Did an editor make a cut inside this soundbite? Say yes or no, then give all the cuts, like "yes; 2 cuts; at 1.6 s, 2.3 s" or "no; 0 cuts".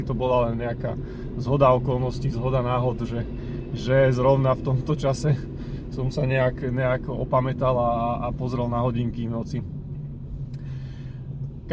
no; 0 cuts